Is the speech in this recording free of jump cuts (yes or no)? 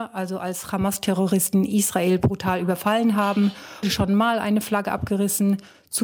no